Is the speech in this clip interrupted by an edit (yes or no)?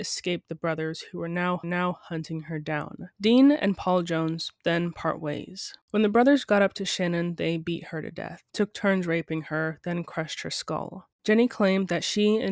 yes